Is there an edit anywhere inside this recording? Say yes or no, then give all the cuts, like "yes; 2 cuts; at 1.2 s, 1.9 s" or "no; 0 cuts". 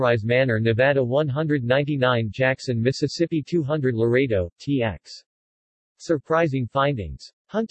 no; 0 cuts